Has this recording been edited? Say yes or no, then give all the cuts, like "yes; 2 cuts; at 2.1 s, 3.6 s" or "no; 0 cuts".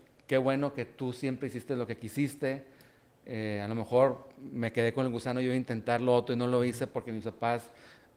no; 0 cuts